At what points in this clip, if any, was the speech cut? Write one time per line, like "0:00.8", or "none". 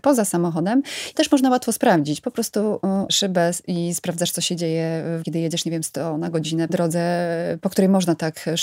0:01.1
0:03.1
0:05.2
0:06.7